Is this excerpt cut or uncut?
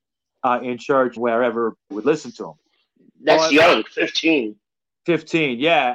cut